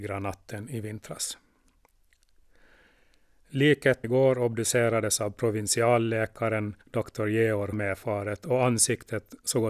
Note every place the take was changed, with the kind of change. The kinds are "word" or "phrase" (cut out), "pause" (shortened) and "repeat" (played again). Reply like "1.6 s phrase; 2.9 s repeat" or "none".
4.0 s word; 6.8 s pause; 7.7 s phrase